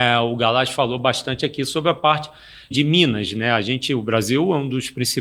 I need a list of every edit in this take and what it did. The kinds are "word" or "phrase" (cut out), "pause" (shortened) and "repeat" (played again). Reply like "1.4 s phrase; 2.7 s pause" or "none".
2.7 s word